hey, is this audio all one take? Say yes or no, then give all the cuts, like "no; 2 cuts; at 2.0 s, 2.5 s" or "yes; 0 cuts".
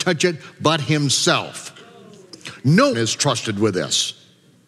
no; 1 cut; at 2.9 s